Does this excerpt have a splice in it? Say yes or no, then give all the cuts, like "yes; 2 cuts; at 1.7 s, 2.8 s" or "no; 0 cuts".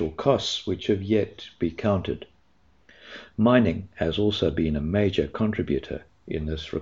no; 0 cuts